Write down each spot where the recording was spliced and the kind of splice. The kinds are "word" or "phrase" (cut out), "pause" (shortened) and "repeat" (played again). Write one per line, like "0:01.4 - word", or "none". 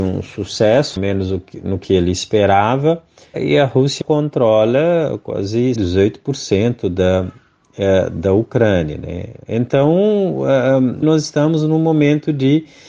0:01.0 - phrase
0:03.3 - word
0:04.0 - word
0:05.8 - word
0:11.0 - word